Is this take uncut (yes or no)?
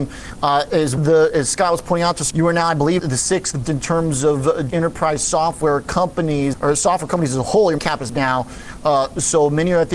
no